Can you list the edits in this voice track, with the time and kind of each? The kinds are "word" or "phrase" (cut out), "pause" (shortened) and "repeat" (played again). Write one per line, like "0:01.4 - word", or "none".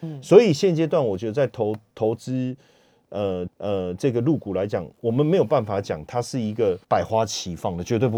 0:03.5 - repeat
0:06.8 - pause